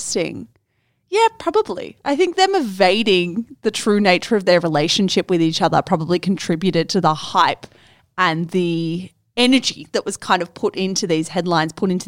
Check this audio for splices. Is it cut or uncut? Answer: uncut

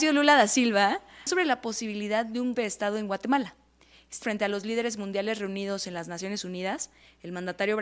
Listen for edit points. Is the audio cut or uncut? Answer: cut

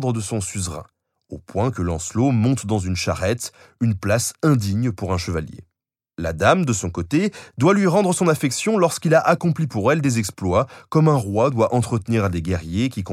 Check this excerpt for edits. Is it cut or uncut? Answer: uncut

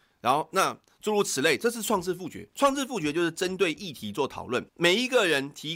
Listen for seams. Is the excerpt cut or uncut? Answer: cut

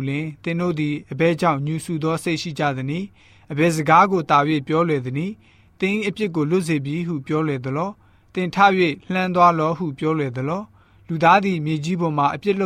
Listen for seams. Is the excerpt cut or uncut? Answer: uncut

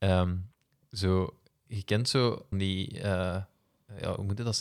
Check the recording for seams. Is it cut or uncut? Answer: cut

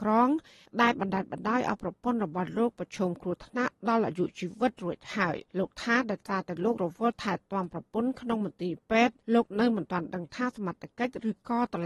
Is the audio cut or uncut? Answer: cut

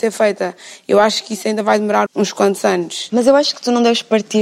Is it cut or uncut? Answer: cut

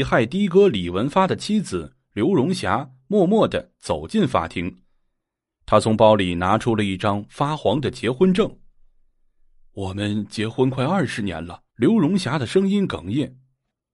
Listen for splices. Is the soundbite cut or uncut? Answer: cut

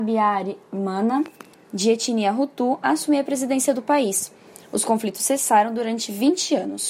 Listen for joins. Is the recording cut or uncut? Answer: uncut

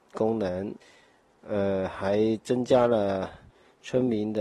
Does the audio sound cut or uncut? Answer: uncut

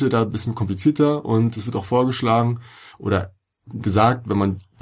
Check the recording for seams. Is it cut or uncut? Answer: uncut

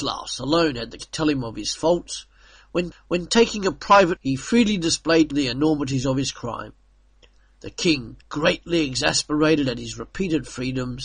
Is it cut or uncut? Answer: cut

